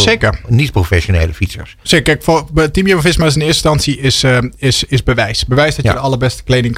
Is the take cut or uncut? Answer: uncut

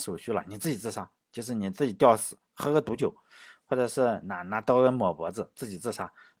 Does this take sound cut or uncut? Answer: cut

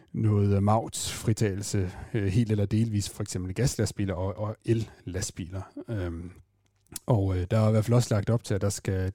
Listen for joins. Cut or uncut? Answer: cut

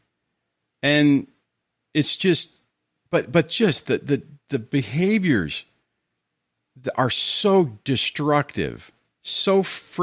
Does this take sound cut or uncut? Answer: uncut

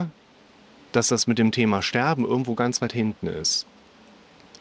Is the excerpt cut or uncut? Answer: uncut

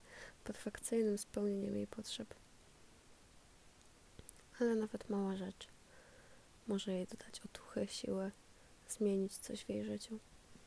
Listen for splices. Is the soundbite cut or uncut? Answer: uncut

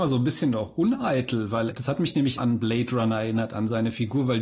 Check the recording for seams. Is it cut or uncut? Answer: cut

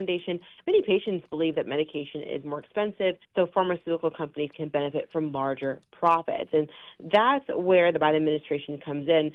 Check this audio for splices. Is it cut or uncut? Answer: cut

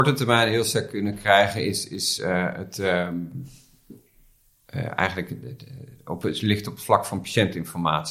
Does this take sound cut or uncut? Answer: uncut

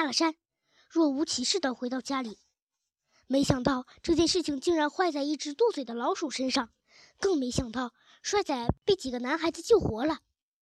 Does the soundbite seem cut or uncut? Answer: uncut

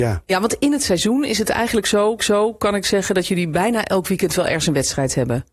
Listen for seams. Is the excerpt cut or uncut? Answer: cut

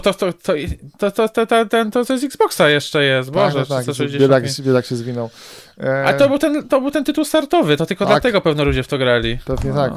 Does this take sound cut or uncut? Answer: uncut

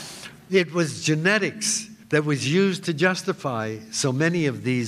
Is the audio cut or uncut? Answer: cut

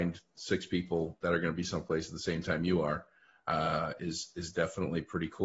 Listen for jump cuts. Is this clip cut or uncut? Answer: uncut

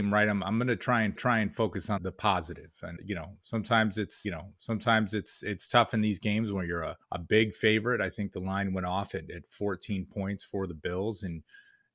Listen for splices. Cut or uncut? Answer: cut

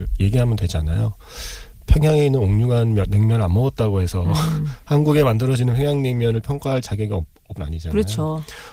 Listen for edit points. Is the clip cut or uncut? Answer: cut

